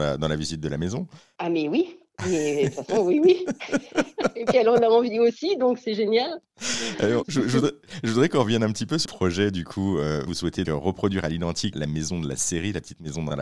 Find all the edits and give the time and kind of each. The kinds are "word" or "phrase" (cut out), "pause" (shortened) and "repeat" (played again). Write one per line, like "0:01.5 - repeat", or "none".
0:07.2 - word
0:09.0 - word
0:10.6 - word
0:11.7 - word